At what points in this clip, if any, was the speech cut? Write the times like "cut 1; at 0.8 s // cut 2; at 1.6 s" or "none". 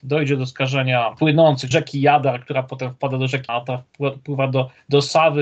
cut 1; at 1.2 s // cut 2; at 1.7 s // cut 3; at 3.5 s